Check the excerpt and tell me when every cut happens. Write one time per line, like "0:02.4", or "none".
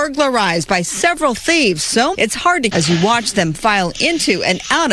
0:02.1
0:02.7

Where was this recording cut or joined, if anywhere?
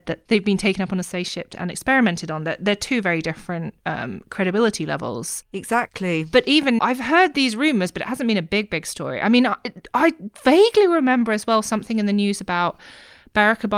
0:06.8

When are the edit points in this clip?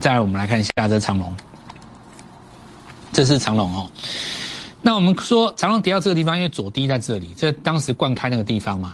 none

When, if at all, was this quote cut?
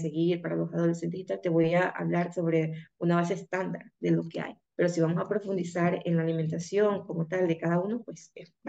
0:04.6

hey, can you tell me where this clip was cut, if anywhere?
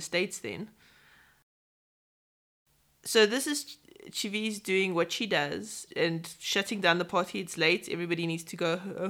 0:05.9

